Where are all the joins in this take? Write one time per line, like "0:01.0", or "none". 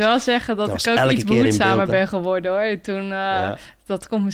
none